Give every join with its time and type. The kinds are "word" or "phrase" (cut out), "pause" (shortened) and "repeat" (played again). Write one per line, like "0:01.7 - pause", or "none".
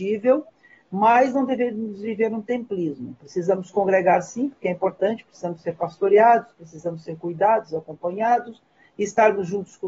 none